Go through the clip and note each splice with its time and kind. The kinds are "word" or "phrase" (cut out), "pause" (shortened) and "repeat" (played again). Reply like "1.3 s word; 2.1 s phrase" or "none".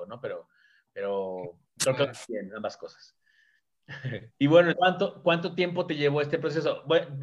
2.3 s word; 4.3 s pause; 4.7 s word